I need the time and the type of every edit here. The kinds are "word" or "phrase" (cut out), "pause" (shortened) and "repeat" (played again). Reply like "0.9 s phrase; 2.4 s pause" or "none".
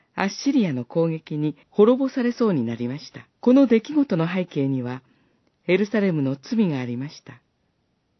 1.6 s pause; 3.3 s pause